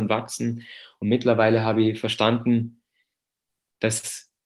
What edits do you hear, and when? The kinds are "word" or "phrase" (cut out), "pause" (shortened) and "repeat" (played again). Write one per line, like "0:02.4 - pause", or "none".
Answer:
none